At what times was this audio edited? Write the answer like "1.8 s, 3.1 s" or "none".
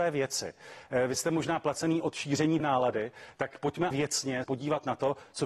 2.6 s, 3.9 s, 4.4 s